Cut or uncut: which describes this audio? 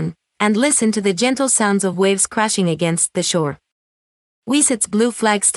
uncut